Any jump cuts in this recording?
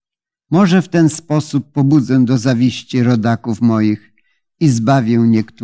no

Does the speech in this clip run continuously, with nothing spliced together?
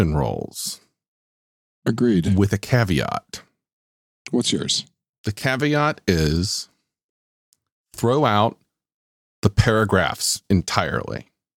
yes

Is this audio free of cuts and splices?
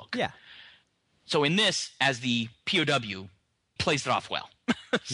no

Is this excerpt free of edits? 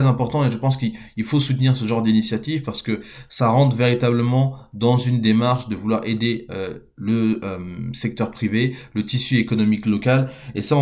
yes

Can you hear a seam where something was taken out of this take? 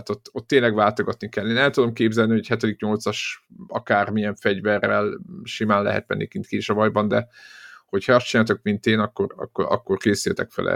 no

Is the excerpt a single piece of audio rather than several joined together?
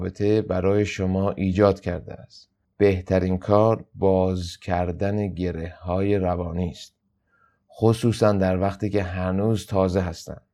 yes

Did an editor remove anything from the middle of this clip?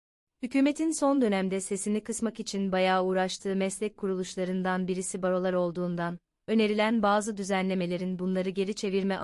no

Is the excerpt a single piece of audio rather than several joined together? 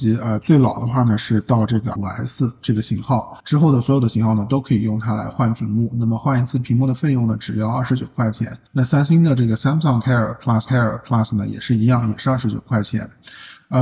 no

